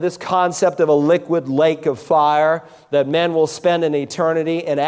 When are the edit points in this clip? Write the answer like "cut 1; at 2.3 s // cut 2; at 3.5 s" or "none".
none